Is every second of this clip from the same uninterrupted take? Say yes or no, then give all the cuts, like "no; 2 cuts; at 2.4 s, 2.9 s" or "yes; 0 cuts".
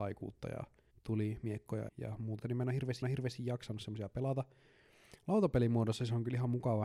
no; 4 cuts; at 0.9 s, 1.9 s, 2.4 s, 3.0 s